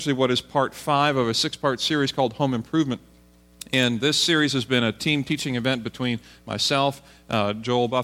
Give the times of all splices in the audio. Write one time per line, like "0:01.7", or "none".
none